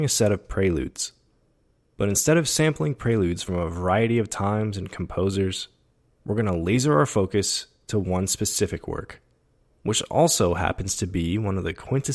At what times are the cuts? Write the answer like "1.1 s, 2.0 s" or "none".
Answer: none